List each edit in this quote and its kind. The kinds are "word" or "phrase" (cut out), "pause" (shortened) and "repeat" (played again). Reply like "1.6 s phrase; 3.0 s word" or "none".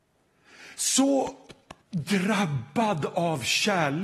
1.8 s pause